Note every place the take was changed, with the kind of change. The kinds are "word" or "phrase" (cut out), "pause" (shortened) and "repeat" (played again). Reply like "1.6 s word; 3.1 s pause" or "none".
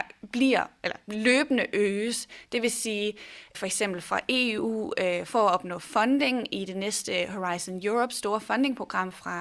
3.5 s word